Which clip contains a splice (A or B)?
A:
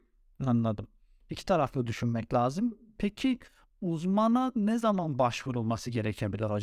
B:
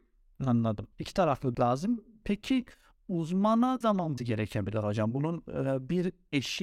B